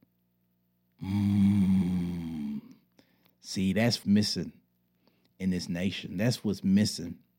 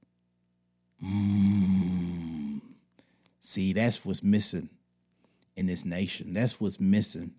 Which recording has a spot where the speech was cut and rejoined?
first; 1 cut; at 4.0 s

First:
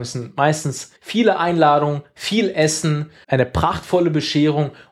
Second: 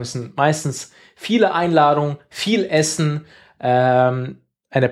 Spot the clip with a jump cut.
first; 2 cuts; at 1.0 s, 3.2 s

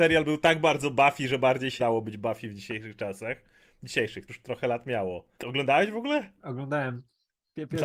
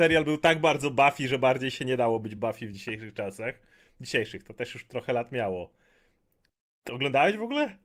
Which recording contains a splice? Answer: first; 3 cuts; at 1.8 s, 4.3 s, 5.3 s

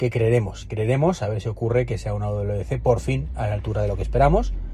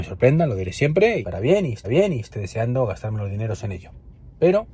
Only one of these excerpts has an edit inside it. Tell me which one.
second; 2 cuts; at 1.2 s, 1.8 s

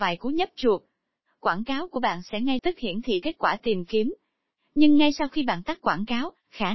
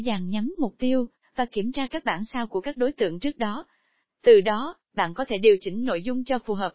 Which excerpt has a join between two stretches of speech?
first; 2 cuts; at 2.6 s, 3.2 s

